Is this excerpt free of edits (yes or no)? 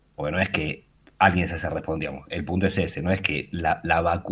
yes